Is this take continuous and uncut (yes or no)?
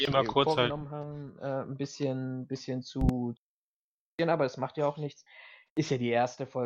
yes